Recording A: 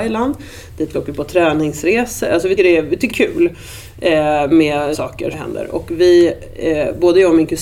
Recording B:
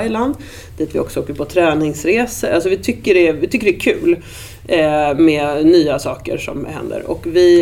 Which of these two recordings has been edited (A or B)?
A